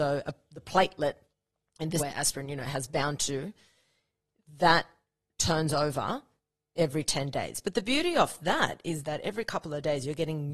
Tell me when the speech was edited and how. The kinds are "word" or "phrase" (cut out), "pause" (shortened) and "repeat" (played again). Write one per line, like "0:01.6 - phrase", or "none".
0:02.0 - word